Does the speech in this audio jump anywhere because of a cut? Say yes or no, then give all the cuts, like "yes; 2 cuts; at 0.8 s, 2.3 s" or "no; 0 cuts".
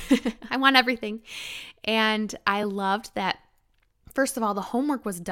no; 0 cuts